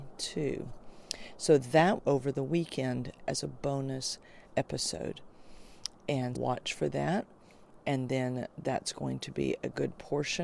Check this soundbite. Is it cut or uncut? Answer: cut